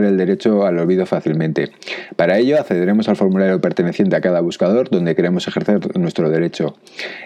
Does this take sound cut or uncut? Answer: uncut